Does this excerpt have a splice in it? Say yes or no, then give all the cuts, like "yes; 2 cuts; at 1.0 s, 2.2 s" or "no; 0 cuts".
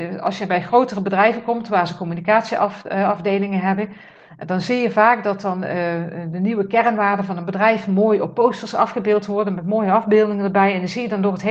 no; 0 cuts